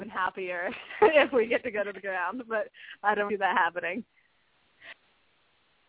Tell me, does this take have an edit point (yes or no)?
yes